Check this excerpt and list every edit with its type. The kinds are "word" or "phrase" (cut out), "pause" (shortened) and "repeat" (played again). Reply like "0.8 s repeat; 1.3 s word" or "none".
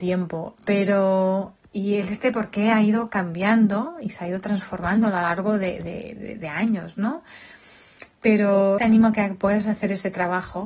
8.8 s word